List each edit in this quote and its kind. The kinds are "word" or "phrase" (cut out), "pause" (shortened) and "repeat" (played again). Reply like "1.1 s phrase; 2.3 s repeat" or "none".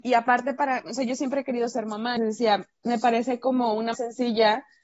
2.2 s word; 3.9 s word